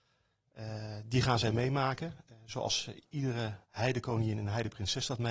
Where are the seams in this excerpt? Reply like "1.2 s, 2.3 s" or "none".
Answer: 3.6 s